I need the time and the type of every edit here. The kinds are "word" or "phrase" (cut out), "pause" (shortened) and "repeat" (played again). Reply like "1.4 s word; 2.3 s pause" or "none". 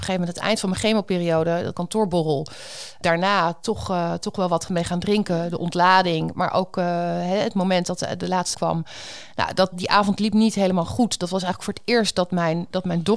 1.7 s phrase; 3.0 s phrase; 8.5 s phrase; 9.7 s phrase